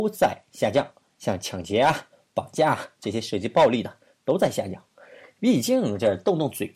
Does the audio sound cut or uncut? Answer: uncut